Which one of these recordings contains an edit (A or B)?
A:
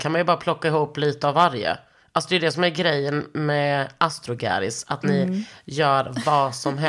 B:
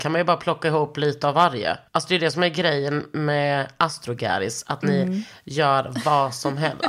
B